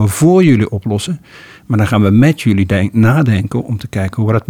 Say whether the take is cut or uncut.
uncut